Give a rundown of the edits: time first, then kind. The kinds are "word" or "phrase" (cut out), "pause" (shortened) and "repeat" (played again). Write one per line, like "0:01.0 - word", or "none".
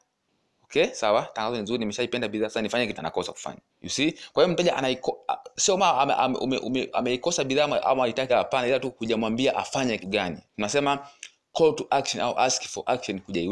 0:03.0 - word
0:03.7 - pause
0:08.3 - word
0:10.0 - word
0:10.5 - pause